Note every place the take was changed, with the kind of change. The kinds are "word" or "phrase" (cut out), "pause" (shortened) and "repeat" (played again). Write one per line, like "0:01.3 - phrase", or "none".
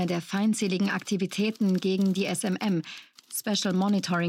none